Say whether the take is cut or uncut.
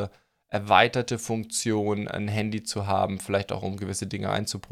uncut